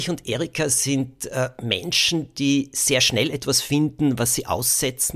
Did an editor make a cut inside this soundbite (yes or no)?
no